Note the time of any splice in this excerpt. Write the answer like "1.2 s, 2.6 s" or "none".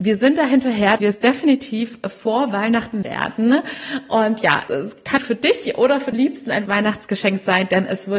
1.0 s, 3.0 s, 4.7 s, 5.2 s, 6.1 s, 6.7 s